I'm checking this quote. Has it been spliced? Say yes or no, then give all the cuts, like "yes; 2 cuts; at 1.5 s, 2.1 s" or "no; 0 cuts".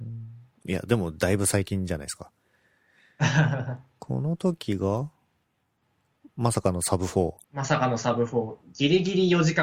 yes; 1 cut; at 7.4 s